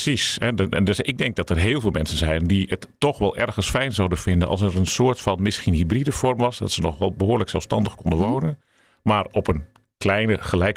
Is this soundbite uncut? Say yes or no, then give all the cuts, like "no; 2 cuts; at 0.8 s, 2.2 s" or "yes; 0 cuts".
yes; 0 cuts